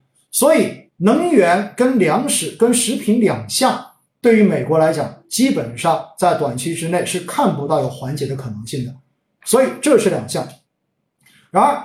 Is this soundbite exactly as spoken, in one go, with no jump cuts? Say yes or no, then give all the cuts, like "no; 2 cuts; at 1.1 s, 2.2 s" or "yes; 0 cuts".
yes; 0 cuts